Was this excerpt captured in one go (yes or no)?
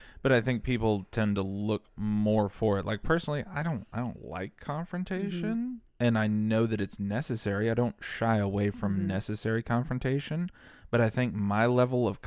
no